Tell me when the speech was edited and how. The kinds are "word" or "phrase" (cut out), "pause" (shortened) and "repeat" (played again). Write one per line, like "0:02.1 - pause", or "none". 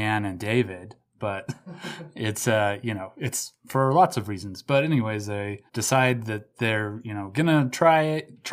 0:05.7 - pause